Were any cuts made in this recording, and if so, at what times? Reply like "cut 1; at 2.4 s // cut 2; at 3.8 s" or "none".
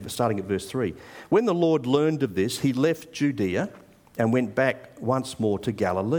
none